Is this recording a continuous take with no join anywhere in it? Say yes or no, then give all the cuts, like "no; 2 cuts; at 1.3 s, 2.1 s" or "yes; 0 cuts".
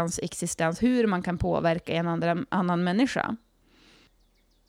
yes; 0 cuts